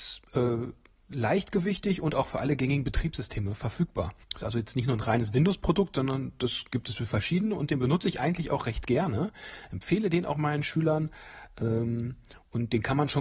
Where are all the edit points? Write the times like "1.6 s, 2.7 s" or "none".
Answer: 4.2 s